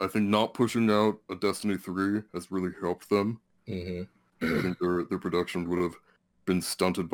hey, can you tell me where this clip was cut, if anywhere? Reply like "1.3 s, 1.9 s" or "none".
2.3 s, 5.7 s